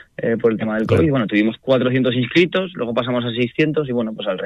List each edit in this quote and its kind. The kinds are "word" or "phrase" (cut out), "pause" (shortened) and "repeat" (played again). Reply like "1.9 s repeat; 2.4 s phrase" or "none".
none